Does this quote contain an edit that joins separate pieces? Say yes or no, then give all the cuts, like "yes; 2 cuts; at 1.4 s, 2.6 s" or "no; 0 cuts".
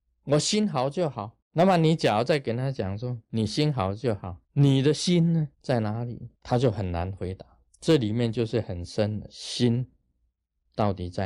yes; 5 cuts; at 1.4 s, 4.4 s, 5.5 s, 6.4 s, 7.7 s